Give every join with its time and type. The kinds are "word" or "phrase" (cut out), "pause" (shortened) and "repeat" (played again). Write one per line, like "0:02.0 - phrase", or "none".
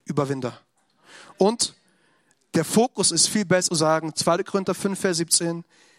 0:03.7 - word